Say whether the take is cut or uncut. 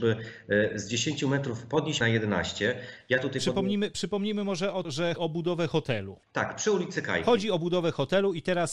cut